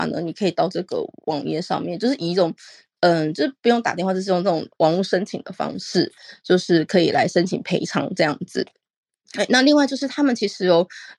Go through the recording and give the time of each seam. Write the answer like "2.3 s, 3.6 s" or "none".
none